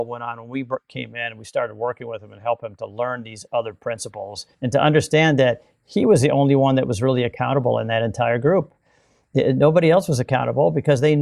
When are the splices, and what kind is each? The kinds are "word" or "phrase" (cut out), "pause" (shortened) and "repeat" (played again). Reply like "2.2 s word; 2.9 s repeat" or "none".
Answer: 4.5 s pause